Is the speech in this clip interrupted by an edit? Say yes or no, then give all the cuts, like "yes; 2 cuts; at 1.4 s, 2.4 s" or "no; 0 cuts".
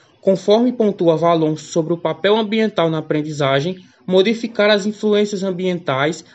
no; 0 cuts